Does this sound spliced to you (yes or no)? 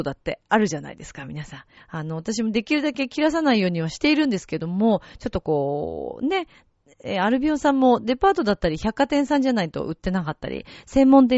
yes